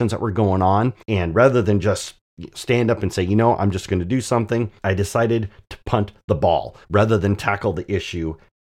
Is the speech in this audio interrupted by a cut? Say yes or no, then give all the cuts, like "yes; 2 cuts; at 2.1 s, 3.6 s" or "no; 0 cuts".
yes; 3 cuts; at 1.0 s, 4.8 s, 6.8 s